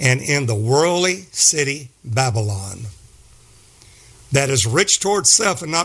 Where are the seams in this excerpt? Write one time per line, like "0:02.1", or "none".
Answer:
none